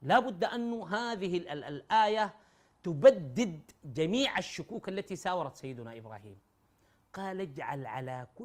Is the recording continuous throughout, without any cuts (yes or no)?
yes